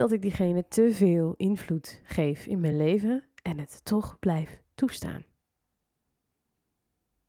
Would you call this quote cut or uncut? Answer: uncut